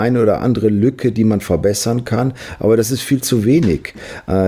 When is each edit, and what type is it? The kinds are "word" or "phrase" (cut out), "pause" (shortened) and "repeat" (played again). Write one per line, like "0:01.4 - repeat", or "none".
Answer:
none

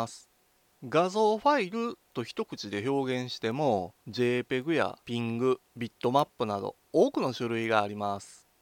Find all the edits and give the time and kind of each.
0:04.0 - pause
0:05.7 - pause

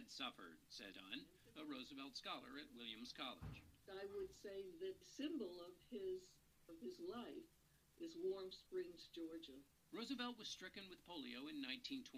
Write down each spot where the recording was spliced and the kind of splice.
0:00.9 - word
0:05.0 - word
0:06.7 - word

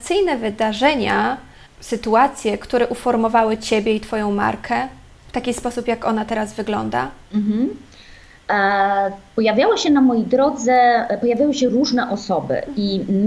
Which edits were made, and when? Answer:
0:01.7 - pause
0:05.1 - pause
0:07.2 - pause

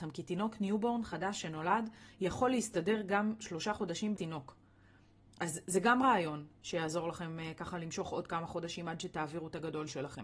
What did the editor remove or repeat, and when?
0:04.1 - word

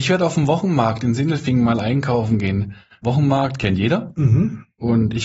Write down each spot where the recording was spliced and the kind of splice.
none

